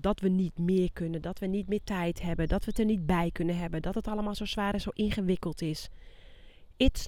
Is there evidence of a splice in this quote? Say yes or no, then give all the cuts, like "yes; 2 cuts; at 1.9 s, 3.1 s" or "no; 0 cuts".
no; 0 cuts